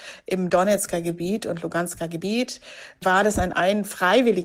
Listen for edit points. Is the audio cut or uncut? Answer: uncut